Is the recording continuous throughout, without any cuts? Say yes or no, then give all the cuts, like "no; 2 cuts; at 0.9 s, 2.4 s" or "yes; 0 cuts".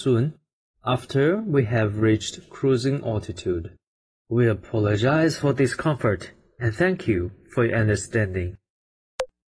yes; 0 cuts